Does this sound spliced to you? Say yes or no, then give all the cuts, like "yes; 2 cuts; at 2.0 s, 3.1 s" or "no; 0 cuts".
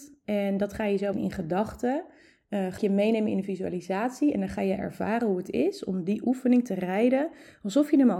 yes; 2 cuts; at 1.1 s, 2.8 s